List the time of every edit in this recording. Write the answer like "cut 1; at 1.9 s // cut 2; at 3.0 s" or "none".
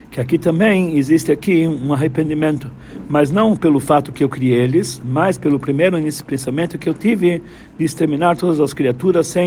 none